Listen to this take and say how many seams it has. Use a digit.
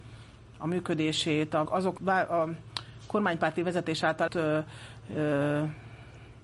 3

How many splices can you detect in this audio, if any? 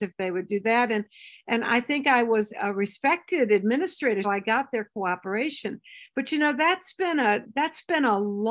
2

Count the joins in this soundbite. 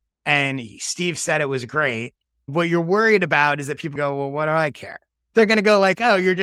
1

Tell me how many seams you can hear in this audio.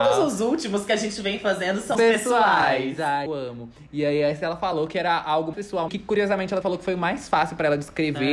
5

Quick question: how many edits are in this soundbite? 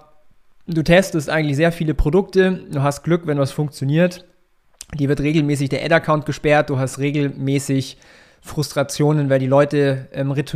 0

